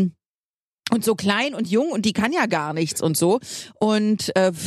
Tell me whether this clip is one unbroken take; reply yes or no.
yes